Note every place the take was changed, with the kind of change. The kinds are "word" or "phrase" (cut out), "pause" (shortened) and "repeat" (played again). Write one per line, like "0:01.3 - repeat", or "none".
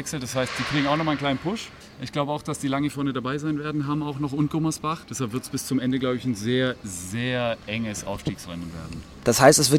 0:01.8 - pause
0:05.0 - pause